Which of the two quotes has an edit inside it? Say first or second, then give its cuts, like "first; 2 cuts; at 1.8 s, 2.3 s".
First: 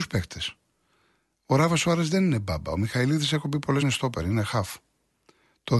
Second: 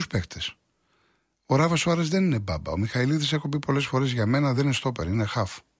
first; 1 cut; at 3.8 s